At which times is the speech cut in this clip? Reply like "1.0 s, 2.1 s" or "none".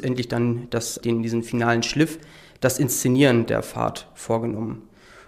1.0 s